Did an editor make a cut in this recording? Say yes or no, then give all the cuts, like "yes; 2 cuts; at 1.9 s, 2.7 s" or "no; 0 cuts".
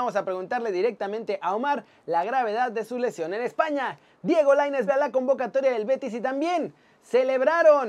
yes; 1 cut; at 4.9 s